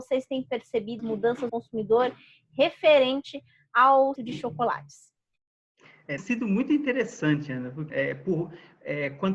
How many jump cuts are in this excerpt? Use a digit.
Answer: 5